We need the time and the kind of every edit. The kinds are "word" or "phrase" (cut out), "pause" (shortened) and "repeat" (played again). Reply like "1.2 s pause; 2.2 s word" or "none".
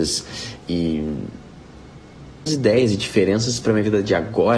2.5 s word